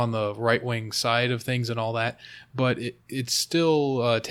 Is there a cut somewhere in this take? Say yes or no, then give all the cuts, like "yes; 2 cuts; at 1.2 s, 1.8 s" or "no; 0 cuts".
yes; 1 cut; at 3.0 s